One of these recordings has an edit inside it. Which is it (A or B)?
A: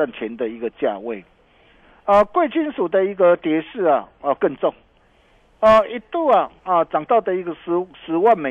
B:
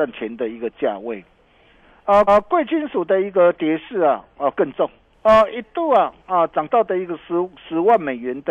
B